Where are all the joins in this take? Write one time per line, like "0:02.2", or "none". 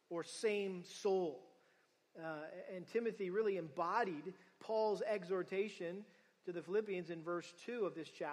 none

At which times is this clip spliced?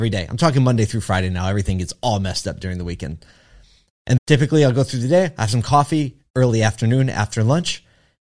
0:04.2

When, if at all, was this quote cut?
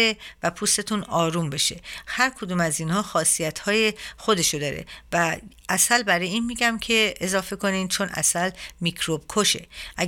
none

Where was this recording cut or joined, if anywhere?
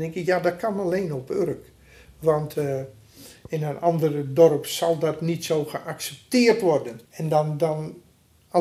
0:07.1

